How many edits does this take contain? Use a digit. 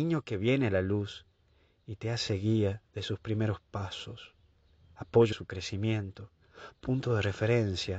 1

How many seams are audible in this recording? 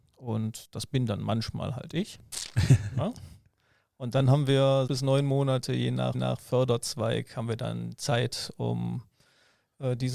2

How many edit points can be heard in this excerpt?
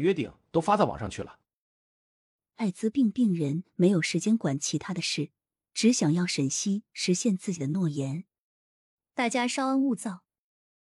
0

